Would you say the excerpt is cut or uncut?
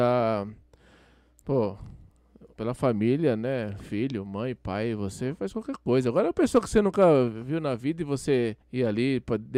cut